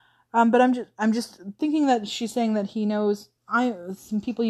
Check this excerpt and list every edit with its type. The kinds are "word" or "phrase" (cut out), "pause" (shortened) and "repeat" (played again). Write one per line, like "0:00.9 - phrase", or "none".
0:03.4 - pause